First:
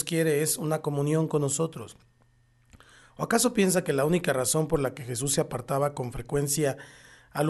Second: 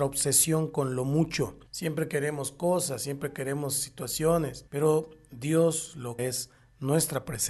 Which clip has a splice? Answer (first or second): second